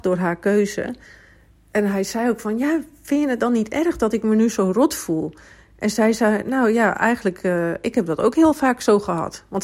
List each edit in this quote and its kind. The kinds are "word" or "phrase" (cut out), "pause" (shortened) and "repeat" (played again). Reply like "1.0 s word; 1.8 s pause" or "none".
none